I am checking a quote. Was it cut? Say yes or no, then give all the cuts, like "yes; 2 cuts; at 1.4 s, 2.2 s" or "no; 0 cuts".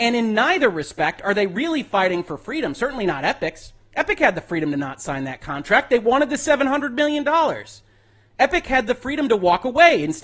no; 0 cuts